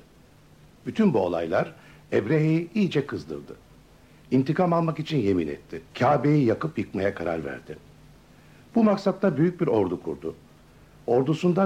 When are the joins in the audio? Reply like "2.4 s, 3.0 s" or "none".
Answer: 5.9 s